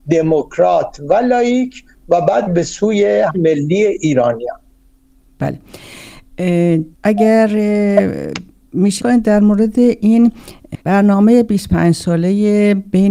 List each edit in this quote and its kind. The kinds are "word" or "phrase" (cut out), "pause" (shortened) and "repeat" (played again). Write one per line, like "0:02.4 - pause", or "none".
0:02.5 - word
0:03.3 - word
0:06.9 - pause
0:09.0 - word
0:10.8 - pause